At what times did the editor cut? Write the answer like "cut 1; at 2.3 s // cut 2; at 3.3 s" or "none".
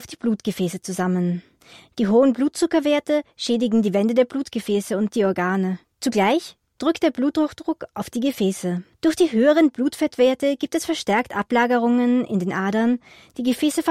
cut 1; at 5.8 s // cut 2; at 8.9 s